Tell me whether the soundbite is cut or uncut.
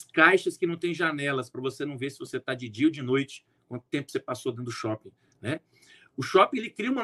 uncut